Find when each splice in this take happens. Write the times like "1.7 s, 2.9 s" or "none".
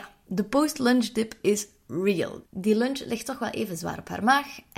2.5 s